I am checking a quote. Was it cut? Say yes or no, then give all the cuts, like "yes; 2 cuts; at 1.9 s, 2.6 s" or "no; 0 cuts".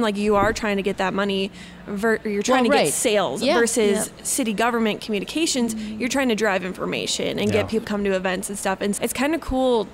yes; 2 cuts; at 7.8 s, 9.0 s